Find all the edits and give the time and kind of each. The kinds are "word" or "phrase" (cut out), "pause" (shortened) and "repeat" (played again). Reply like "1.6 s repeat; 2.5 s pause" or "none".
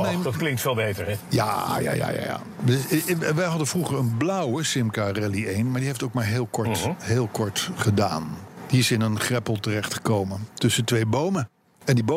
none